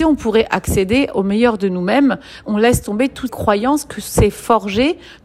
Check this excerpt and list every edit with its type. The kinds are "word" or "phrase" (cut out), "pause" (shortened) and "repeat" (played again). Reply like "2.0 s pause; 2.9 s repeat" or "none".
2.4 s word; 3.3 s word